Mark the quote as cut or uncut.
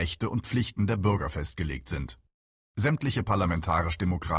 uncut